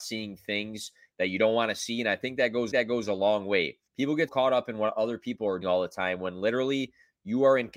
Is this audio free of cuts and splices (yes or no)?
no